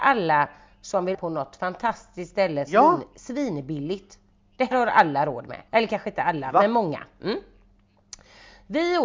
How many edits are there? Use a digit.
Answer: 4